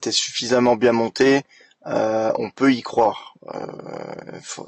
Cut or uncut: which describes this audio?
uncut